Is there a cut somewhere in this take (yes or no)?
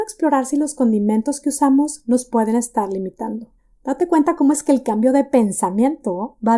yes